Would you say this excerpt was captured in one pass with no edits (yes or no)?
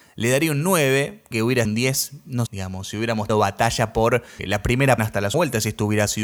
no